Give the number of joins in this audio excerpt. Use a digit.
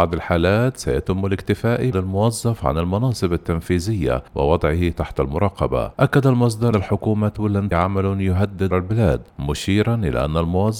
7